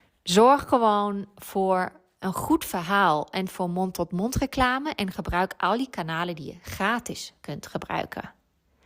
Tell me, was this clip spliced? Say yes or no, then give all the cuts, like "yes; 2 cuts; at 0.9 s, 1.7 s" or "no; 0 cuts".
no; 0 cuts